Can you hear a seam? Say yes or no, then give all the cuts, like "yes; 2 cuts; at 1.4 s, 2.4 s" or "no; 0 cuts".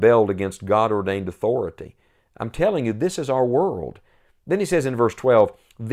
no; 0 cuts